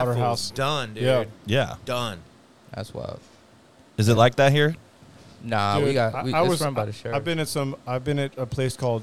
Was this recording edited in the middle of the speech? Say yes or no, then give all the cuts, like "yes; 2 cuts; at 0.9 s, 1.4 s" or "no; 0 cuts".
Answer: no; 0 cuts